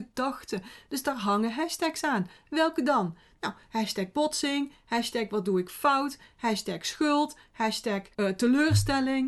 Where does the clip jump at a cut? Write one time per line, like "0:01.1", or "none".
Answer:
0:08.1